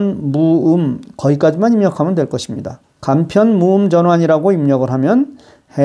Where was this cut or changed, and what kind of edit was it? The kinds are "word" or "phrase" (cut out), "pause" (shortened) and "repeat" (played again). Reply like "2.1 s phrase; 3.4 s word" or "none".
2.9 s pause